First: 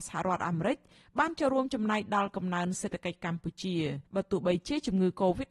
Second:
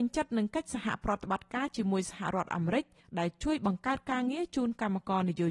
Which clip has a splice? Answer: first; 1 cut; at 4.1 s

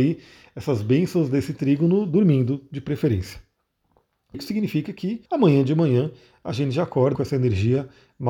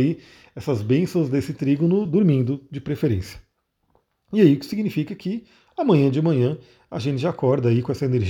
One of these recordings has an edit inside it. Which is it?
first; 3 cuts; at 4.3 s, 5.3 s, 7.1 s

